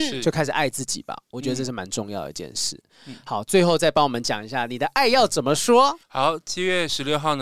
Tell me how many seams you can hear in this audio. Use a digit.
1